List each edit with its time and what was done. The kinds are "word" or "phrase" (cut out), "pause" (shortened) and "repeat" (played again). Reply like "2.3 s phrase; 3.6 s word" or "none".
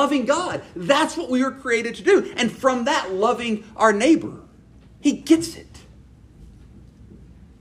none